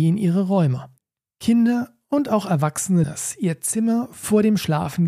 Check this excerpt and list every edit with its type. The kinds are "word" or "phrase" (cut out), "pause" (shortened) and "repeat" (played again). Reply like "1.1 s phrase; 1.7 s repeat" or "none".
3.0 s word